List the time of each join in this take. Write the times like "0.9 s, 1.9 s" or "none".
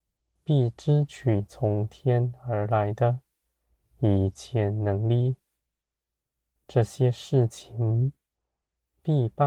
none